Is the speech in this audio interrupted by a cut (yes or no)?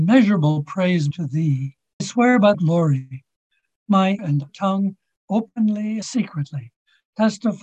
yes